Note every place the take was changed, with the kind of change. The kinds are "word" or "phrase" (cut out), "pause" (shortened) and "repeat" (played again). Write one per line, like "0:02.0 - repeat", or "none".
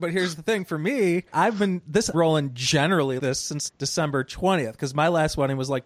0:01.3 - word
0:02.1 - phrase
0:03.2 - word
0:03.7 - word

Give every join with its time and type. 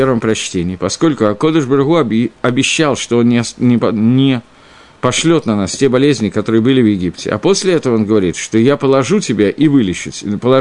none

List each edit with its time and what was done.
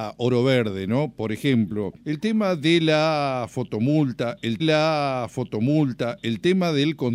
0:02.0 - pause
0:04.6 - repeat

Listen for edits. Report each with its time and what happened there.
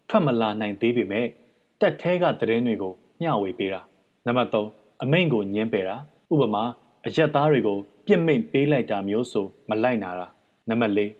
none

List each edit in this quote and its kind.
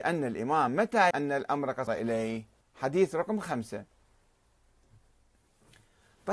0:01.1 - word
0:01.9 - word
0:02.6 - pause

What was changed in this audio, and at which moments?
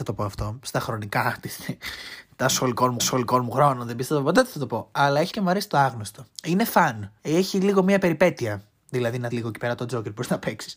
0:03.0 - repeat
0:05.3 - word
0:06.3 - pause
0:07.2 - pause
0:09.3 - word

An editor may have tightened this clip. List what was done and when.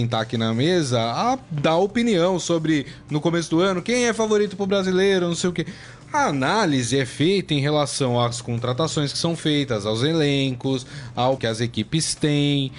0:11.4 - phrase

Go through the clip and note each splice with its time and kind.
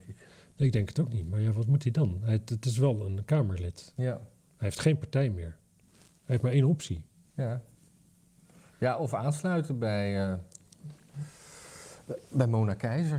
none

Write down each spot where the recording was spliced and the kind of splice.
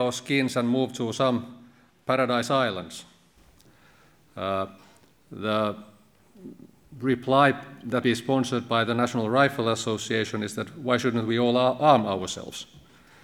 0:08.0 - word

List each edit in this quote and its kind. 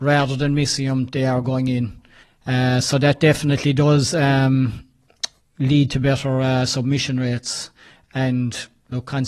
0:02.2 - pause
0:05.4 - pause

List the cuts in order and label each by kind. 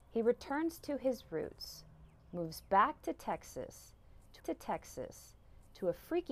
0:04.4 - repeat

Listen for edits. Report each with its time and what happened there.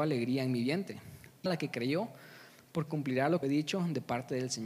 0:01.5 - word
0:02.9 - word
0:03.4 - word

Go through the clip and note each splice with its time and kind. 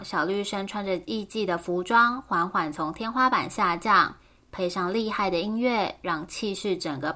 none

